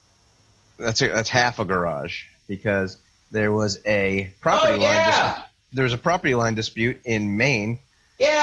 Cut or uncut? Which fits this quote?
uncut